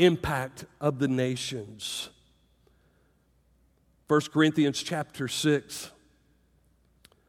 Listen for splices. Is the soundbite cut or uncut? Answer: uncut